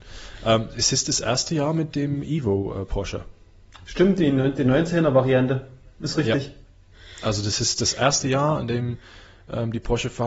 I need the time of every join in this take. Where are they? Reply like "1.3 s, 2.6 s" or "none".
none